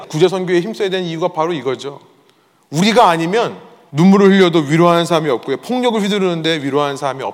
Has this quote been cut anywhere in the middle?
no; 0 cuts

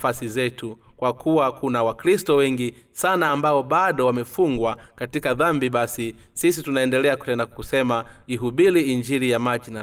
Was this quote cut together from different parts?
no; 0 cuts

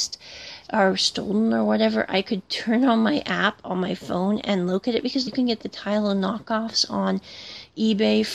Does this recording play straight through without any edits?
no; 1 cut; at 5.3 s

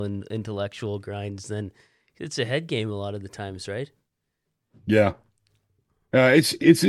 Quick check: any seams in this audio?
no; 0 cuts

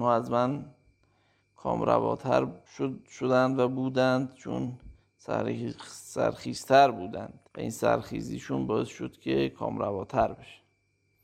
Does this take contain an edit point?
yes; 2 cuts; at 2.7 s, 7.5 s

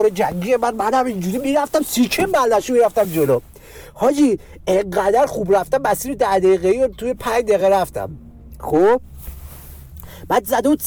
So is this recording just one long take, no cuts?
yes; 0 cuts

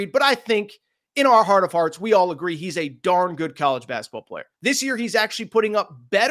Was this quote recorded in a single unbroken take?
no; 1 cut; at 4.5 s

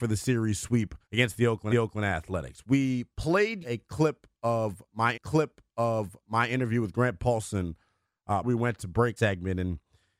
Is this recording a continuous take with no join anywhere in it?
no; 6 cuts; at 1.0 s, 1.7 s, 3.6 s, 5.1 s, 8.4 s, 9.2 s

